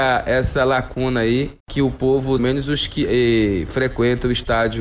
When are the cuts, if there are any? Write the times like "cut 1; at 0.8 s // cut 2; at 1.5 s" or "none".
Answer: cut 1; at 1.6 s // cut 2; at 2.4 s